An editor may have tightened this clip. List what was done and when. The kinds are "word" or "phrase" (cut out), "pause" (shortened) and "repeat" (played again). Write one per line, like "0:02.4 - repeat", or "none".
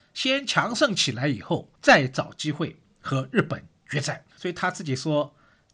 0:01.8 - pause
0:04.3 - pause